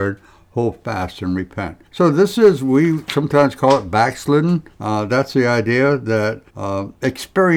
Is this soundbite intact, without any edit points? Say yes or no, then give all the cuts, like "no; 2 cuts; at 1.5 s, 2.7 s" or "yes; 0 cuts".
no; 3 cuts; at 1.9 s, 4.7 s, 6.5 s